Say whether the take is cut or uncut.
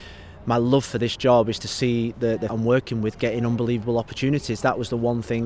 cut